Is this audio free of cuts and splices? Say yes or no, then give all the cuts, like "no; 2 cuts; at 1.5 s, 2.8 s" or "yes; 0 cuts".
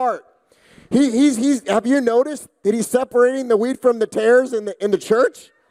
yes; 0 cuts